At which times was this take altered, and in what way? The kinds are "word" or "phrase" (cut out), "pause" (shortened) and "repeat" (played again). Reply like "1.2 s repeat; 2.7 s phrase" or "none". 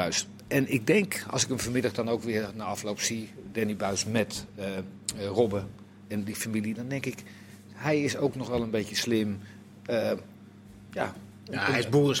none